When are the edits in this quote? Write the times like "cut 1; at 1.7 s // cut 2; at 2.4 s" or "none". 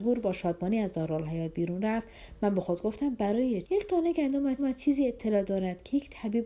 cut 1; at 3.6 s // cut 2; at 4.6 s